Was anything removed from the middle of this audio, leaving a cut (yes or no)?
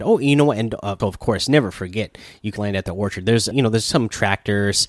yes